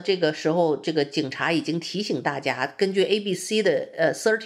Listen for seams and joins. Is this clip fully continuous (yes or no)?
yes